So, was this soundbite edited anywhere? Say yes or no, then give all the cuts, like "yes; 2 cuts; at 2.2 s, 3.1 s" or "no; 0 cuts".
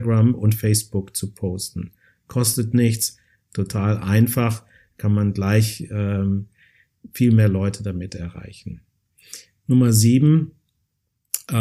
no; 0 cuts